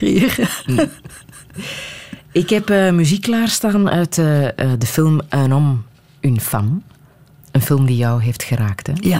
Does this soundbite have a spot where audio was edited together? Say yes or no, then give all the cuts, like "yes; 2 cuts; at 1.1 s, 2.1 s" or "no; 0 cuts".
no; 0 cuts